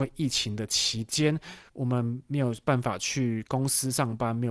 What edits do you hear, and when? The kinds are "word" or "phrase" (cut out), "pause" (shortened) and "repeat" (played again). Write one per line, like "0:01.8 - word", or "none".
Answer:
0:01.7 - pause